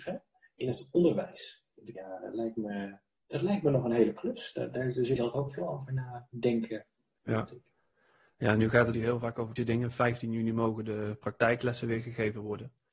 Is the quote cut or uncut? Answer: cut